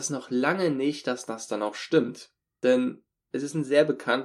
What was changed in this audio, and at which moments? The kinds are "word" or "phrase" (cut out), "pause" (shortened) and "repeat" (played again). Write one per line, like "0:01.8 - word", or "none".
none